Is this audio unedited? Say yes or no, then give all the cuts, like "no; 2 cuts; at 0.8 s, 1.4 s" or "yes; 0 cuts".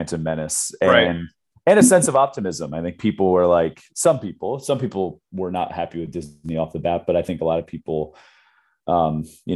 yes; 0 cuts